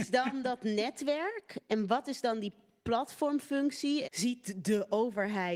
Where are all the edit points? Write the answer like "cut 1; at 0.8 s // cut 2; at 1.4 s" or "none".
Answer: cut 1; at 4.0 s